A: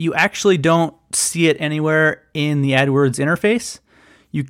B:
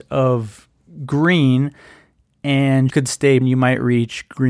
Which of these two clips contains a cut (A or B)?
B